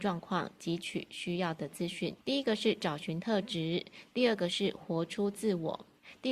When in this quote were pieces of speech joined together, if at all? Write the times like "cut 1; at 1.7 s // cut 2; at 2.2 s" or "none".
cut 1; at 2.2 s

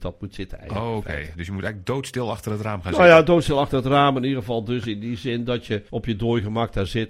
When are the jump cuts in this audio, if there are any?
cut 1; at 5.9 s

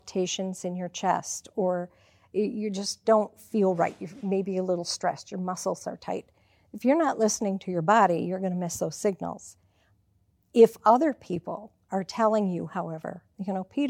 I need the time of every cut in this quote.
none

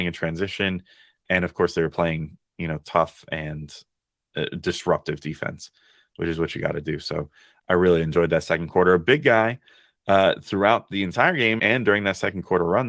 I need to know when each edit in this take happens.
cut 1; at 11.6 s

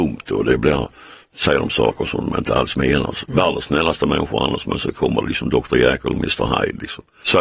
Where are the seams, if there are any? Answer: none

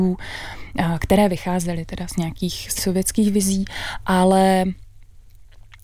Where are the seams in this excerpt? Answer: cut 1; at 2.8 s

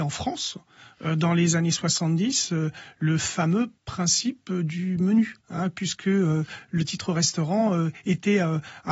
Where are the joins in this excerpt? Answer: cut 1; at 3.8 s // cut 2; at 5.4 s

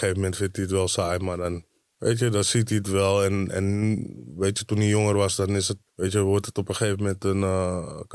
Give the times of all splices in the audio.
cut 1; at 1.9 s // cut 2; at 5.9 s

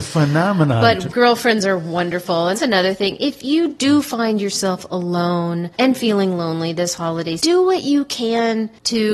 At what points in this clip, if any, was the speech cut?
cut 1; at 1.1 s // cut 2; at 2.5 s // cut 3; at 5.7 s // cut 4; at 7.4 s

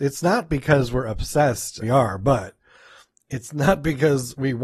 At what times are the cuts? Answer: cut 1; at 1.8 s

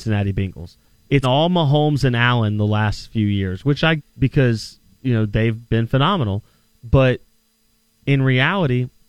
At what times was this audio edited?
cut 1; at 1.2 s // cut 2; at 4.0 s

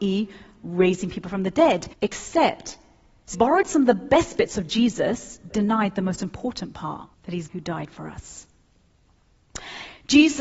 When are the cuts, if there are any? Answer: cut 1; at 1.9 s // cut 2; at 3.3 s // cut 3; at 5.5 s // cut 4; at 7.1 s // cut 5; at 7.5 s

